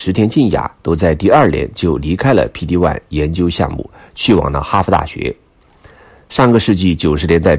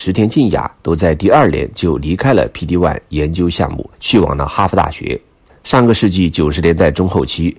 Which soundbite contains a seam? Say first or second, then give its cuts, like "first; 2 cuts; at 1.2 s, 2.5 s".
second; 2 cuts; at 3.9 s, 5.5 s